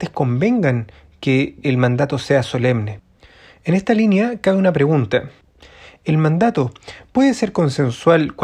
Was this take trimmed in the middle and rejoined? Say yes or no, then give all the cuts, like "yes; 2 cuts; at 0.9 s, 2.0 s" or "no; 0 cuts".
no; 0 cuts